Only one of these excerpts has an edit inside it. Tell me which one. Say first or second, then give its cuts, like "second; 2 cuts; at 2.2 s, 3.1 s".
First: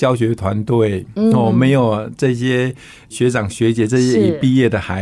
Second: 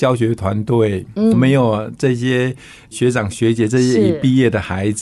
second; 1 cut; at 1.3 s